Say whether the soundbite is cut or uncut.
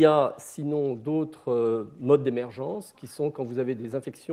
uncut